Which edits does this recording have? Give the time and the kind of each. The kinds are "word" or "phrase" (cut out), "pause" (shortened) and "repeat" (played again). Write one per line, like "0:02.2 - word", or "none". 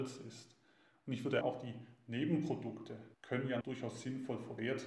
0:01.4 - phrase
0:03.1 - pause
0:03.6 - word